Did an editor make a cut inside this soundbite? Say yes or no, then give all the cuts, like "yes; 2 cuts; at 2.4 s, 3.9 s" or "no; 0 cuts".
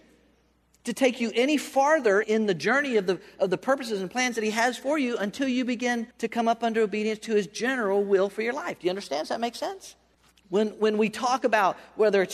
yes; 3 cuts; at 2.2 s, 6.1 s, 10.1 s